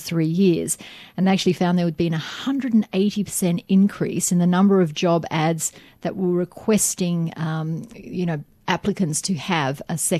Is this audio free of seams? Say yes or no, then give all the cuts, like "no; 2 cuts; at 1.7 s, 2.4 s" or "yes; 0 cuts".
yes; 0 cuts